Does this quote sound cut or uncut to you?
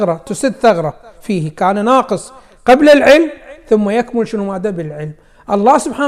uncut